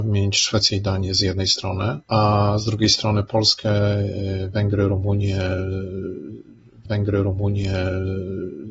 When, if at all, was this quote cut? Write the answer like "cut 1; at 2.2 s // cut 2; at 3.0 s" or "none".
cut 1; at 2.0 s // cut 2; at 6.9 s